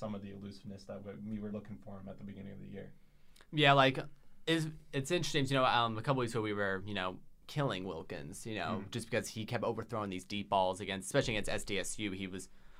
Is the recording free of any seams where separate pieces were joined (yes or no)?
no